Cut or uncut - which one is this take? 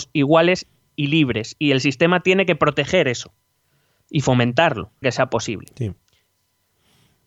cut